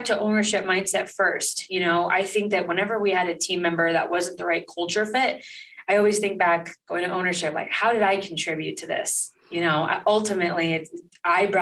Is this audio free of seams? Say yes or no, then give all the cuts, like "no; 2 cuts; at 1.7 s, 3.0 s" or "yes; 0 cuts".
no; 2 cuts; at 6.8 s, 9.4 s